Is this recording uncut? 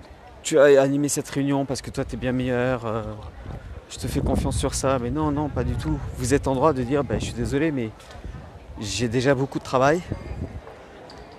yes; 0 cuts

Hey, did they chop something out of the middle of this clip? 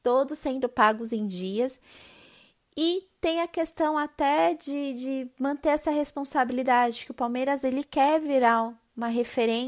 no; 0 cuts

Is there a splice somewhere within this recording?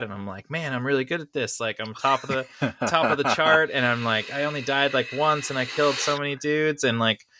no; 0 cuts

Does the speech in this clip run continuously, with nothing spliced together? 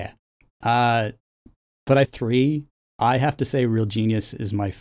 no; 1 cut; at 2.1 s

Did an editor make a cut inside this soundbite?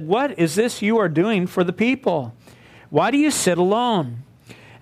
no; 0 cuts

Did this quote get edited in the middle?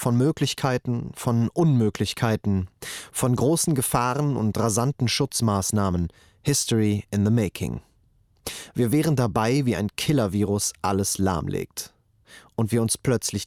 no; 0 cuts

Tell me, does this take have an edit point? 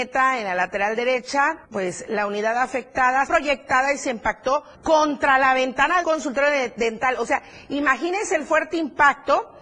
yes; 4 cuts; at 1.6 s, 3.3 s, 4.7 s, 6.0 s

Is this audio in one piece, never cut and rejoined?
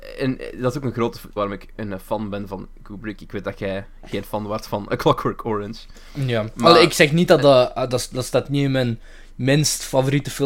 no; 1 cut; at 1.4 s

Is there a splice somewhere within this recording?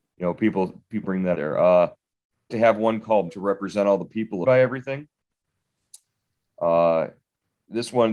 yes; 5 cuts; at 1.0 s, 1.3 s, 2.5 s, 3.3 s, 4.4 s

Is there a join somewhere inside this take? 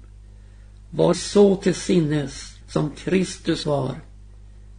yes; 3 cuts; at 1.1 s, 2.6 s, 3.6 s

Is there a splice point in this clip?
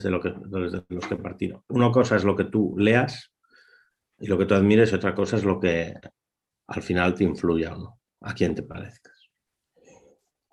no; 0 cuts

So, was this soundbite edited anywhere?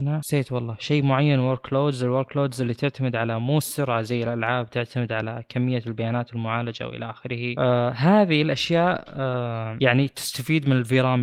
no; 0 cuts

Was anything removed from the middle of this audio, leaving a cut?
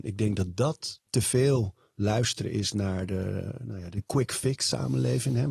no; 0 cuts

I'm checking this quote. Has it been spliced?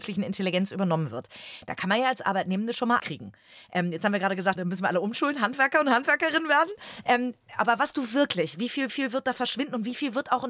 yes; 4 cuts; at 3.0 s, 4.6 s, 7.9 s, 8.9 s

